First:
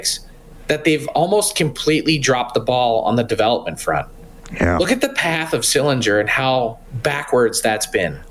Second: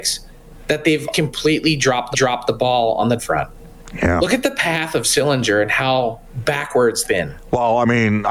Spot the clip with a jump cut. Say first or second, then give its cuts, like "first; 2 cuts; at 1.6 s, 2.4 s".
second; 4 cuts; at 1.1 s, 2.1 s, 3.2 s, 7.0 s